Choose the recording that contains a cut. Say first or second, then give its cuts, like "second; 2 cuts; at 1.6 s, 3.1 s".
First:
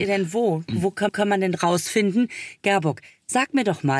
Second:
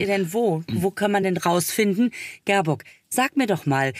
first; 1 cut; at 1.1 s